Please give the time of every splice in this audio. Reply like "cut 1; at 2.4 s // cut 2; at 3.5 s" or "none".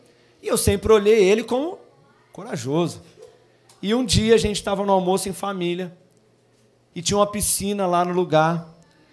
none